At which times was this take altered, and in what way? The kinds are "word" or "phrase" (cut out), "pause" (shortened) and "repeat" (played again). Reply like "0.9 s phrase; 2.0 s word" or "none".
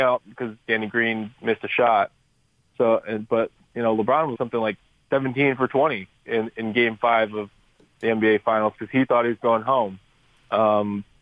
4.3 s word